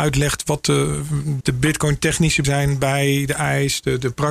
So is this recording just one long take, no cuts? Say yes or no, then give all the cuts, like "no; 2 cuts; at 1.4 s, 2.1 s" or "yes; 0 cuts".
no; 2 cuts; at 1.4 s, 2.4 s